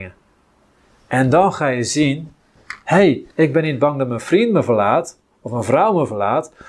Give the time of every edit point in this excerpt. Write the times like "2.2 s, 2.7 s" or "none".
3.3 s